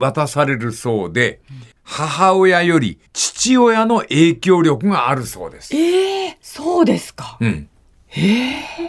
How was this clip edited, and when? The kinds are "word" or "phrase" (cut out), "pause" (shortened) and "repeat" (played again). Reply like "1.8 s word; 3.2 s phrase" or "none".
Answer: 1.7 s pause; 3.1 s pause; 6.4 s pause; 7.8 s pause

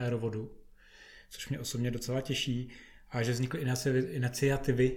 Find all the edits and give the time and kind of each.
none

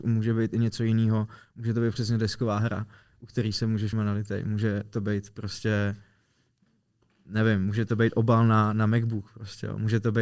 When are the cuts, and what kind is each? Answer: 3.9 s phrase

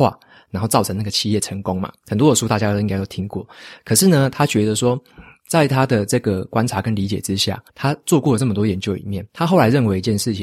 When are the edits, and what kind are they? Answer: 7.7 s pause; 9.3 s pause

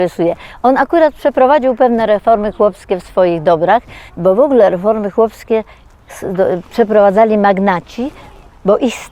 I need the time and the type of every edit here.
4.1 s pause

